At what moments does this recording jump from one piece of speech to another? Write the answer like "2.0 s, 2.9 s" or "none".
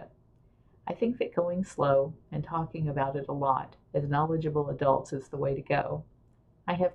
3.8 s